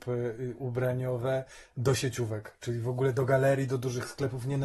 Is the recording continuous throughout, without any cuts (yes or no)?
yes